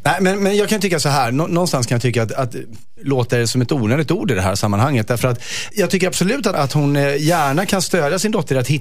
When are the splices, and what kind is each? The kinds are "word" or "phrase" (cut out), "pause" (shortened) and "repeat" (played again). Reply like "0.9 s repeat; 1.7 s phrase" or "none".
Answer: 3.0 s word; 5.7 s word; 6.5 s word